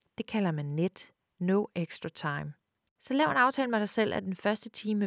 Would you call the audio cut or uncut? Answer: uncut